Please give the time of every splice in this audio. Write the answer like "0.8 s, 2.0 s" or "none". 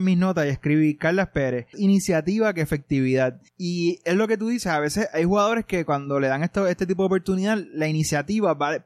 1.7 s, 3.5 s